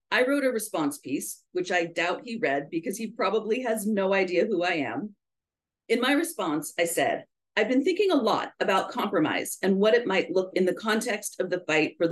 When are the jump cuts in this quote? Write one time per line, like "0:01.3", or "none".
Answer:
0:10.5